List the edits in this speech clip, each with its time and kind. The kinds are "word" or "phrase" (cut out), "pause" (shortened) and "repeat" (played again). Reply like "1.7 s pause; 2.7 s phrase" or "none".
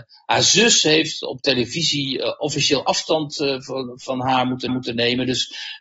4.7 s repeat